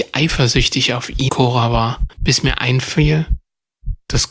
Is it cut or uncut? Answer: cut